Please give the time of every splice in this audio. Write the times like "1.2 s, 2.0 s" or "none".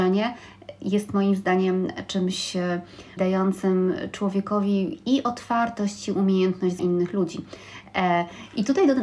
3.2 s, 6.8 s